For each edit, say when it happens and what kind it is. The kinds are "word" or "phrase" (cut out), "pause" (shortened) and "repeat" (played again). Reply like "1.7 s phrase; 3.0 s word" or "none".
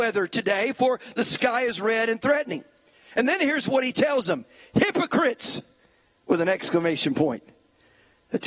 none